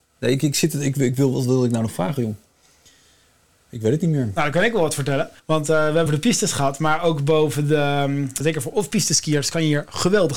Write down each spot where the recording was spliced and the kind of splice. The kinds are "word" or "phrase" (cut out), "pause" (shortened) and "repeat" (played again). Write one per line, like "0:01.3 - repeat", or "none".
0:05.4 - pause
0:06.1 - phrase
0:08.4 - word